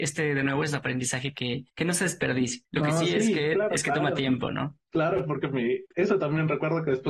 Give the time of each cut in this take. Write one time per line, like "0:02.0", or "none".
0:01.7
0:05.9